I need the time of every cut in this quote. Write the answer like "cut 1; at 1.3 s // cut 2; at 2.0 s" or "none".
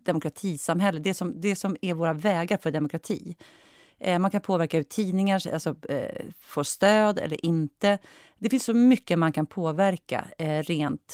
none